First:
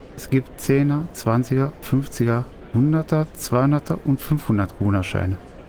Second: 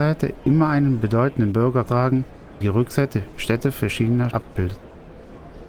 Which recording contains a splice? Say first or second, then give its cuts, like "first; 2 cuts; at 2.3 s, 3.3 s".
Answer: second; 3 cuts; at 1.9 s, 2.6 s, 4.3 s